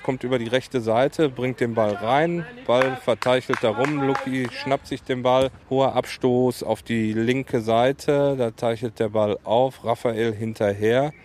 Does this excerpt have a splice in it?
yes; 1 cut; at 5.6 s

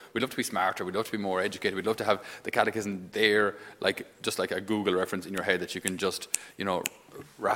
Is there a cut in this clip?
no; 0 cuts

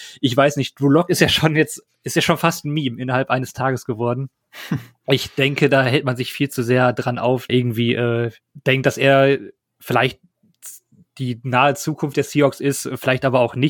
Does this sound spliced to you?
yes; 2 cuts; at 7.5 s, 8.4 s

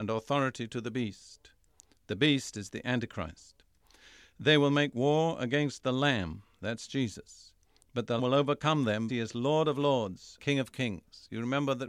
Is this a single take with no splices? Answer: no; 3 cuts; at 8.2 s, 9.1 s, 10.4 s

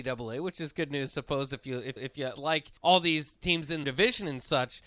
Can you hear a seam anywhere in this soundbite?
yes; 5 cuts; at 1.1 s, 2.0 s, 2.4 s, 2.8 s, 3.8 s

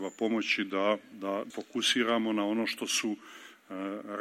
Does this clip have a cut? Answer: yes; 2 cuts; at 1.1 s, 1.5 s

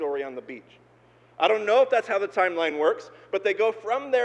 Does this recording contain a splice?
no; 0 cuts

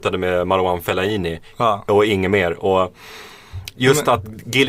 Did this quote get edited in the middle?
no; 0 cuts

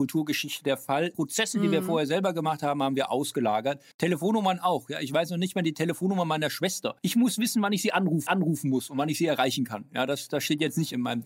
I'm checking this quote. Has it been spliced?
yes; 3 cuts; at 3.9 s, 7.0 s, 8.3 s

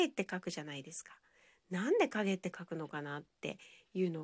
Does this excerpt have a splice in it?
no; 0 cuts

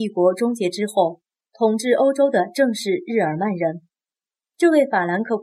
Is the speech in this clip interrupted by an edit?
no; 0 cuts

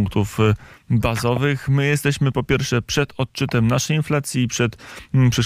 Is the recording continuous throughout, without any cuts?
yes; 0 cuts

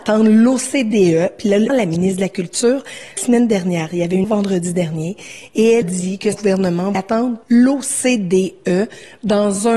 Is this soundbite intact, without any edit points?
no; 7 cuts; at 1.7 s, 3.2 s, 4.2 s, 5.8 s, 6.3 s, 6.9 s, 7.4 s

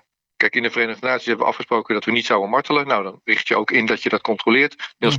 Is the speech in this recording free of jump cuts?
yes; 0 cuts

